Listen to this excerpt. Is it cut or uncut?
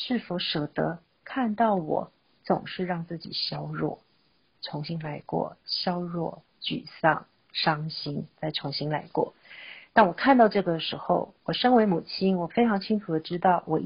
uncut